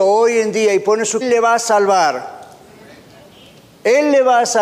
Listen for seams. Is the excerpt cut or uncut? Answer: cut